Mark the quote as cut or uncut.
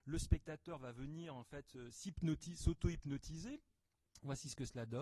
uncut